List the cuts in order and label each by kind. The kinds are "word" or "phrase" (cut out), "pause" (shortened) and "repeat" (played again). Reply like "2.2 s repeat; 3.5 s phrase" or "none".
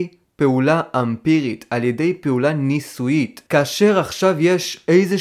3.5 s pause